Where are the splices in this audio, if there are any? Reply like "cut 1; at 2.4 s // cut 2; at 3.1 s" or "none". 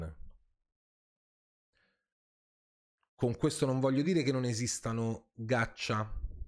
none